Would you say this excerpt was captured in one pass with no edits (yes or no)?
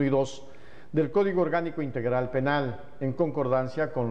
yes